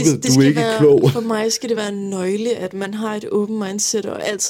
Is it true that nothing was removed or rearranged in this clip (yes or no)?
yes